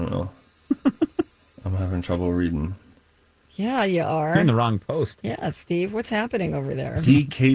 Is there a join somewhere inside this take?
no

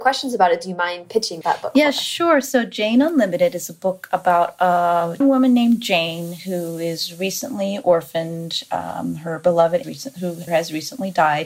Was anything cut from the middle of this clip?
yes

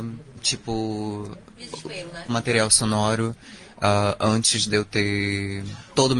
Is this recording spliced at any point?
yes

